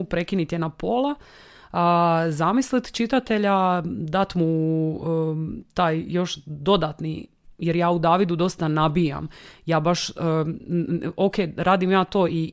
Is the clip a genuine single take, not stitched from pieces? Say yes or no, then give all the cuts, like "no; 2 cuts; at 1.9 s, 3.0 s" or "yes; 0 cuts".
yes; 0 cuts